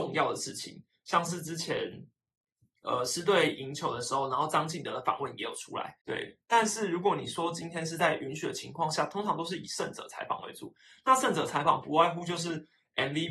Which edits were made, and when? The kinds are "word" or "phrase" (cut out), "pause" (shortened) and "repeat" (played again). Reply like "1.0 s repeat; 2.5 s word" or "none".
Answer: 6.0 s pause